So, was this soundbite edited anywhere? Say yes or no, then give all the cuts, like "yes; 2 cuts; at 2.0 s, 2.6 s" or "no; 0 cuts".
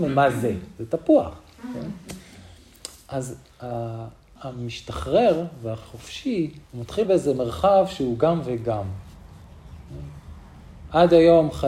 yes; 3 cuts; at 4.4 s, 6.6 s, 7.0 s